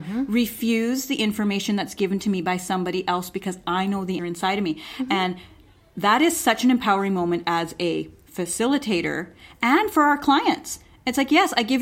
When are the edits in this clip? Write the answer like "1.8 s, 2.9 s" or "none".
4.2 s